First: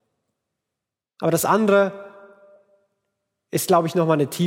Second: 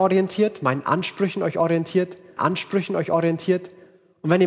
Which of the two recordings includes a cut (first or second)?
second